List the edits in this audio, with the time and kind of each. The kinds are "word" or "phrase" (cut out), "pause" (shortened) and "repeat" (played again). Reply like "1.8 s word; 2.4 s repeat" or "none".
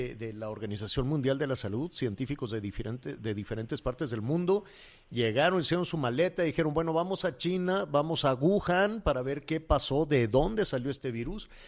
none